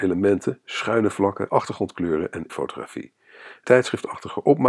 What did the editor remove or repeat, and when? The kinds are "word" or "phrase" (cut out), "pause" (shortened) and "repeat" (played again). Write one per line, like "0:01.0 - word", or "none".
0:01.5 - word
0:02.5 - word
0:03.6 - word